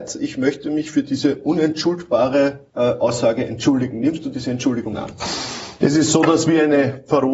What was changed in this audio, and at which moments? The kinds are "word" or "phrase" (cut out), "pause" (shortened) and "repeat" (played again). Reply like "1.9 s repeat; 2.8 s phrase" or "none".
2.7 s pause